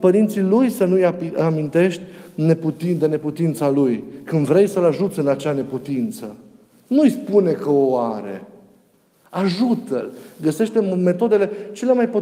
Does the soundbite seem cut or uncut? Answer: uncut